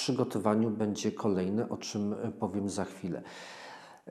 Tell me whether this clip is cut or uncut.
uncut